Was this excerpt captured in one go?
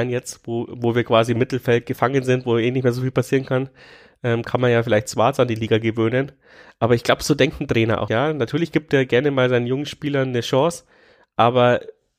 no; 1 cut; at 8.1 s

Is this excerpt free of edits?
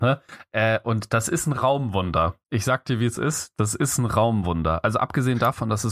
yes; 0 cuts

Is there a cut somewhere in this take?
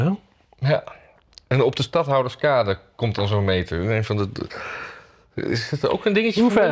no; 0 cuts

